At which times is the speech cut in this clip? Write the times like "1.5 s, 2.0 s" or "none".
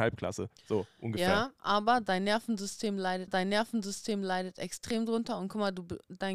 3.3 s